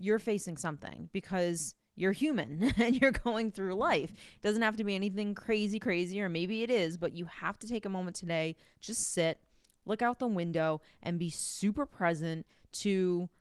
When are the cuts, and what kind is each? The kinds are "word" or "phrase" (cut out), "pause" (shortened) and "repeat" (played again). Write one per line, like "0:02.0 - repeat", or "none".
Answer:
none